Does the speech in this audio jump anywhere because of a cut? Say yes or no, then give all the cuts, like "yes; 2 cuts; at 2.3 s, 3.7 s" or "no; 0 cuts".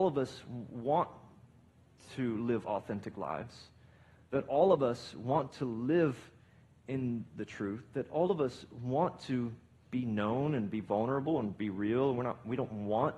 no; 0 cuts